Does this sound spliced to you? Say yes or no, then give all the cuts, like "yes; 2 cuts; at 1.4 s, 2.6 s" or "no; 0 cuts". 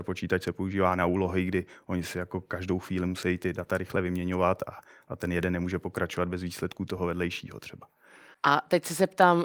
no; 0 cuts